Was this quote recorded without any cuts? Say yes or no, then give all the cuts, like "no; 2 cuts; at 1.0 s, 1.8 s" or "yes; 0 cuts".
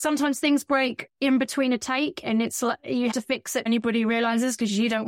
no; 2 cuts; at 3.1 s, 3.7 s